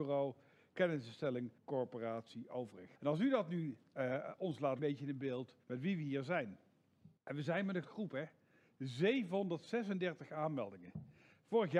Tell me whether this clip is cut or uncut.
cut